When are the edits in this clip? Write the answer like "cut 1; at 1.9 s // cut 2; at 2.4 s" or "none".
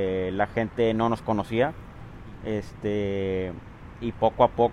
none